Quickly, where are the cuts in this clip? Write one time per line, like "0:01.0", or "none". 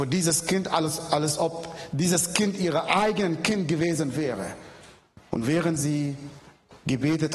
0:05.2